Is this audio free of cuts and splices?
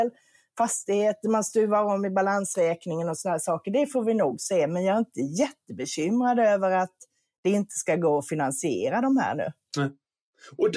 yes; 0 cuts

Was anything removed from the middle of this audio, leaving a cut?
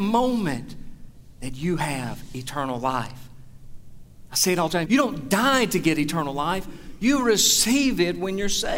yes; 1 cut; at 4.8 s

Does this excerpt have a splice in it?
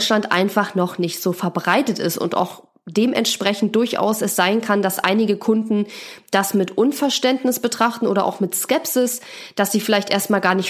no; 0 cuts

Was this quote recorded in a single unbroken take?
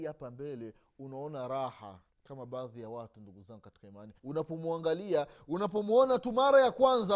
no; 2 cuts; at 2.1 s, 4.2 s

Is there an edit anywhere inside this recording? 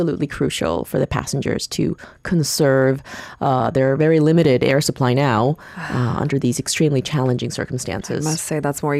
no; 0 cuts

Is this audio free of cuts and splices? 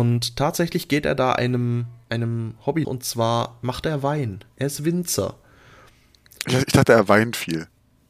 no; 1 cut; at 2.8 s

